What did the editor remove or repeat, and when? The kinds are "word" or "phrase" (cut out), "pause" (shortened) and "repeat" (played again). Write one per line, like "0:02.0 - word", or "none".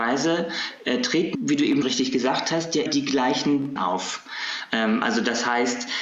0:01.3 - word
0:01.8 - word
0:02.9 - word
0:03.8 - word